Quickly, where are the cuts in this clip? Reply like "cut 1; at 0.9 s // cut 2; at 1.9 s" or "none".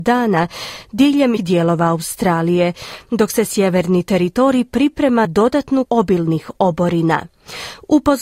cut 1; at 1.4 s // cut 2; at 5.2 s // cut 3; at 5.8 s